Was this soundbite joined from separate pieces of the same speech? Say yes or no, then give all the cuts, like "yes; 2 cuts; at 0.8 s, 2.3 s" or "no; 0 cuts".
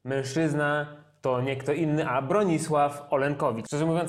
no; 0 cuts